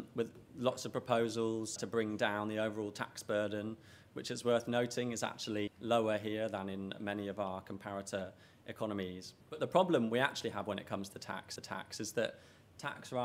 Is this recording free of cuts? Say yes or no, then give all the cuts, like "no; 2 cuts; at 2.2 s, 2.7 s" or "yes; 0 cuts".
no; 4 cuts; at 1.8 s, 5.7 s, 9.4 s, 11.6 s